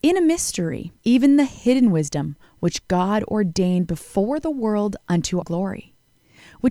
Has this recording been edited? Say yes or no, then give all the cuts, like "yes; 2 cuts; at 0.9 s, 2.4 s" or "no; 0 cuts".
yes; 2 cuts; at 1.0 s, 5.4 s